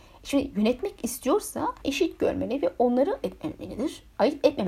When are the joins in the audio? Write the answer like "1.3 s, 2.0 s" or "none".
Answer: 1.8 s, 3.2 s